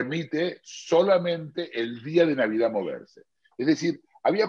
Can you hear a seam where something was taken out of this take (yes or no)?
no